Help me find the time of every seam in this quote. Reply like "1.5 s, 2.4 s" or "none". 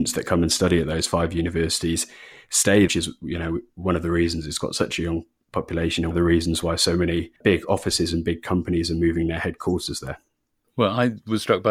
2.9 s, 6.1 s, 7.4 s